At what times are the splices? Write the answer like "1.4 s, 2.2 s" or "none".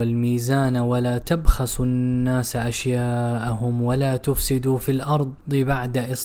none